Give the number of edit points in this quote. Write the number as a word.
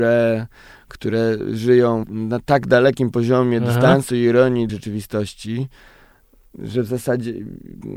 two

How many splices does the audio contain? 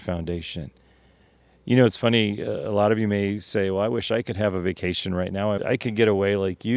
one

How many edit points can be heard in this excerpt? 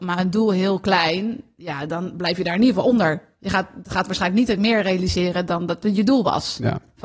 zero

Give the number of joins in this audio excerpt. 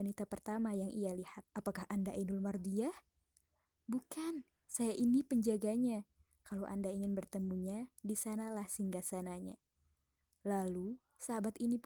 one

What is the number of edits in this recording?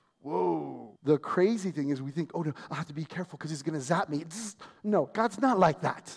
one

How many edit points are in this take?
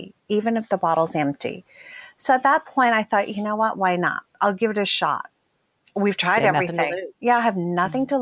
zero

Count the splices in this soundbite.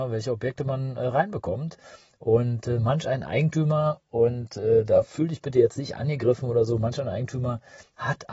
zero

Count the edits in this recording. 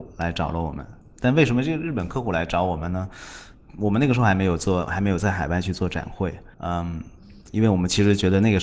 one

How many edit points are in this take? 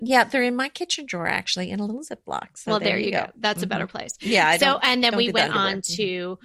zero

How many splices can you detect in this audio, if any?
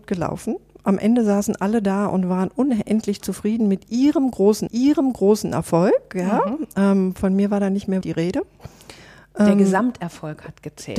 two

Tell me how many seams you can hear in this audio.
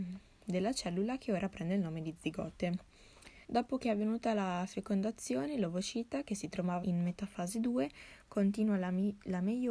two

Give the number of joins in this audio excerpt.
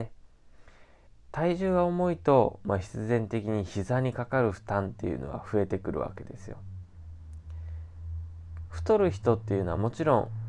one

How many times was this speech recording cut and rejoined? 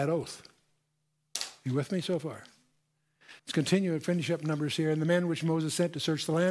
one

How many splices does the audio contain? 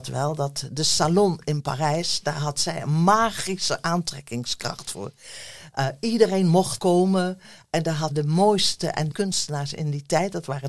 three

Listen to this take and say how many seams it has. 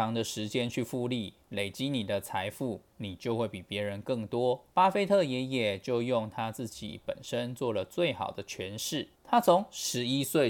three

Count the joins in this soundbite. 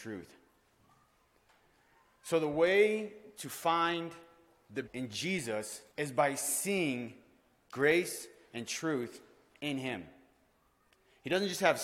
two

